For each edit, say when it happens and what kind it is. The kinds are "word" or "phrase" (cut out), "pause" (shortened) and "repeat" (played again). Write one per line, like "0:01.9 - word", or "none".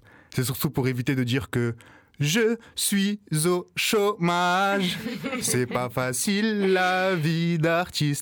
none

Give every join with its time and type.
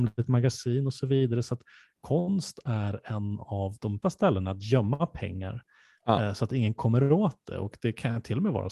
0:04.0 - word

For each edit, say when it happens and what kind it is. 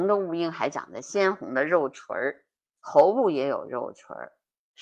none

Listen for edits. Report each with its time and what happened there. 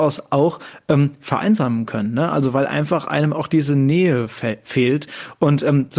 none

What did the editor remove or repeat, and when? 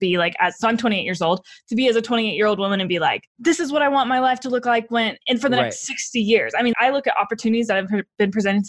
0:03.3 - pause
0:06.7 - word

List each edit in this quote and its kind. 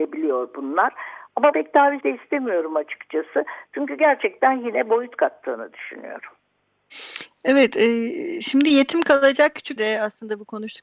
0:01.5 - word
0:02.0 - word
0:09.8 - word

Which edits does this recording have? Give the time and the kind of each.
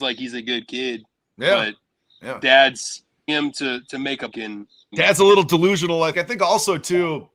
0:03.3 - word
0:04.3 - word
0:04.9 - word
0:06.1 - word

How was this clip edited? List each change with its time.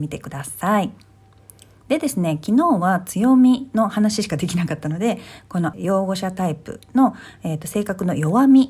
0:05.7 - word

